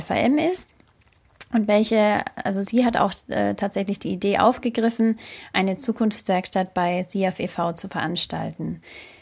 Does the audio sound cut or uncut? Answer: uncut